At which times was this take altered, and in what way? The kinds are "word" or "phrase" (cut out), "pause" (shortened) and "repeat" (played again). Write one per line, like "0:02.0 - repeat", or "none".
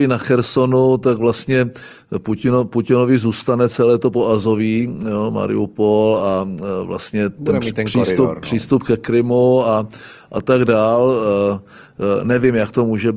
none